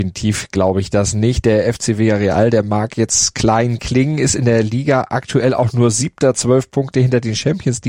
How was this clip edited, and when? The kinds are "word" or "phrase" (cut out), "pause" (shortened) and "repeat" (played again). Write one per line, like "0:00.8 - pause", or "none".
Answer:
none